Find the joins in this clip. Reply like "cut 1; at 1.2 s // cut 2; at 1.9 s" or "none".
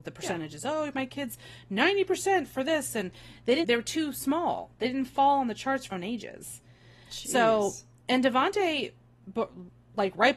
cut 1; at 3.6 s // cut 2; at 5.9 s

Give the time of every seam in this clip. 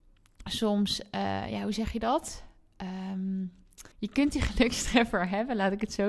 cut 1; at 3.9 s

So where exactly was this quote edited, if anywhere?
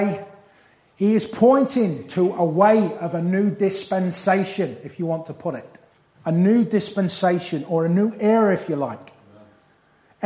cut 1; at 6.0 s

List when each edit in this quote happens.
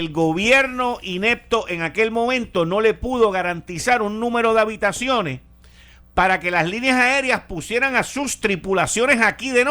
none

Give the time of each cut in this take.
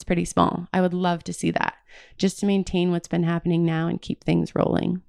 none

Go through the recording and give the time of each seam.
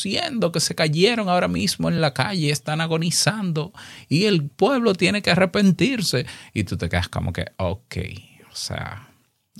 none

